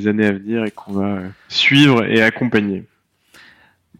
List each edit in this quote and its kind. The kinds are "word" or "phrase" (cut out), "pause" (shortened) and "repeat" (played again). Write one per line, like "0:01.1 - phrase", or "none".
none

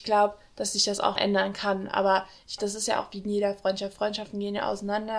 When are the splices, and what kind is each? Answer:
0:01.2 - word
0:02.6 - word

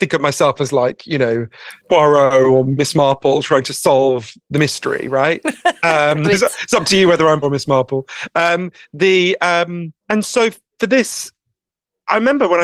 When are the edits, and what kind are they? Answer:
0:01.8 - pause
0:06.2 - word
0:07.4 - word
0:10.0 - pause

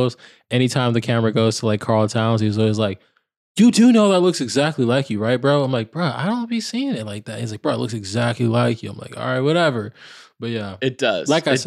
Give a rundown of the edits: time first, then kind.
none

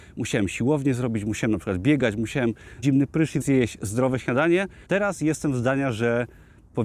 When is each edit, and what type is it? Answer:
0:02.8 - word
0:03.4 - word
0:04.9 - pause

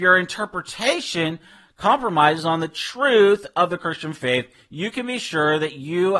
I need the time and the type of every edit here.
none

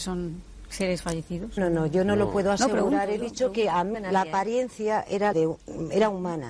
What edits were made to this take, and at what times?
0:01.6 - word
0:03.9 - word
0:05.3 - word

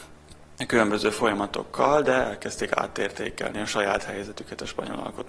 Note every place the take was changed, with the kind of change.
none

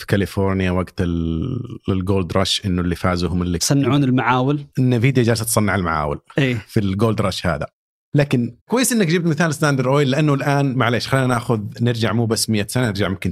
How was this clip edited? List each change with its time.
0:03.6 - word
0:04.7 - pause
0:08.6 - pause

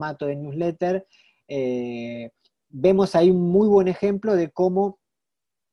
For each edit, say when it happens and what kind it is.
none

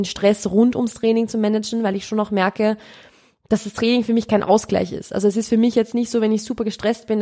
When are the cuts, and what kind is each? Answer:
none

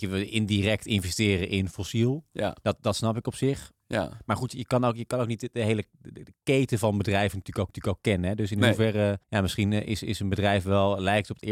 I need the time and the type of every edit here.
0:07.7 - repeat
0:09.2 - pause

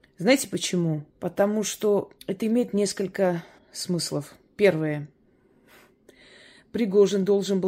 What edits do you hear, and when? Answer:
0:01.1 - pause
0:02.2 - pause
0:03.6 - pause

